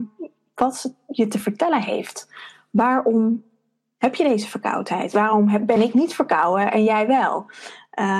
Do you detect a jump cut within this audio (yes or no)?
no